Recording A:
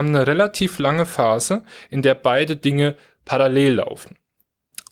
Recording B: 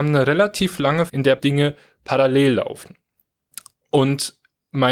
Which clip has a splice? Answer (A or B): B